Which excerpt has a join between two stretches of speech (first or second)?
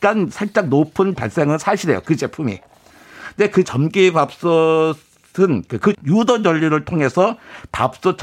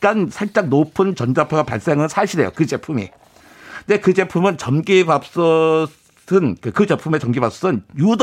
first